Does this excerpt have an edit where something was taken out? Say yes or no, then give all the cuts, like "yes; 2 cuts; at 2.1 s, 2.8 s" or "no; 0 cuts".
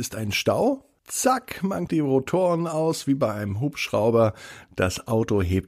yes; 2 cuts; at 1.0 s, 1.9 s